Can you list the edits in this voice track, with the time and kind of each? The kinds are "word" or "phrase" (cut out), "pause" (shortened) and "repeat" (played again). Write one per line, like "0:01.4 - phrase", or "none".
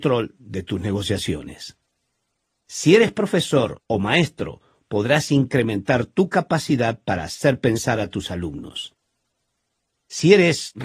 0:03.8 - pause